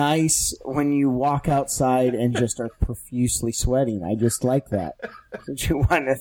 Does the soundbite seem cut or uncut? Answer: uncut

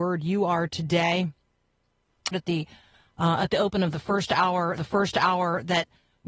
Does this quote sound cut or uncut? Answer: cut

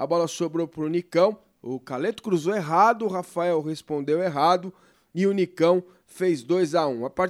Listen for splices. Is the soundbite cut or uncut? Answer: uncut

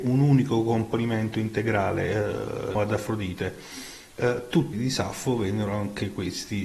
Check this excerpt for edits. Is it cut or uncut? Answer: cut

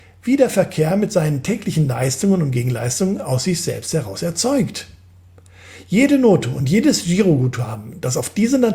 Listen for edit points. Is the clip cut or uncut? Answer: uncut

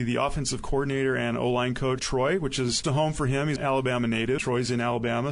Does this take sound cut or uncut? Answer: cut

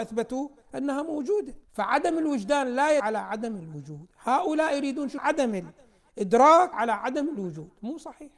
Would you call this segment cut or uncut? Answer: cut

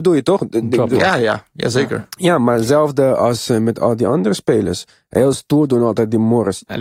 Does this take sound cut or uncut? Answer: uncut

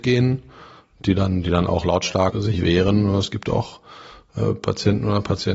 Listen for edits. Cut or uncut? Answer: cut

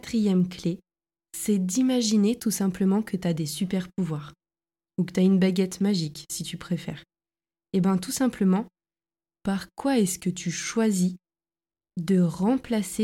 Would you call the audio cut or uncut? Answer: uncut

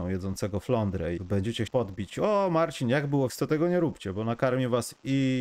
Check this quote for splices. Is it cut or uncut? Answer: cut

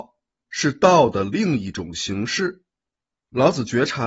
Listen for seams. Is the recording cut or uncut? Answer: uncut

